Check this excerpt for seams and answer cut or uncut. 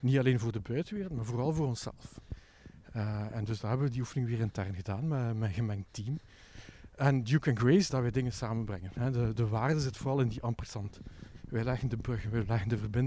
cut